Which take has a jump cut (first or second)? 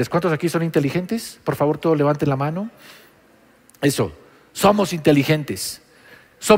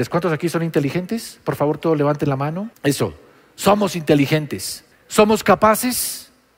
second